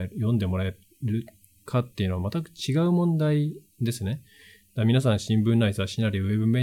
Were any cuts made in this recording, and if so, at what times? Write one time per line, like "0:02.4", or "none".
none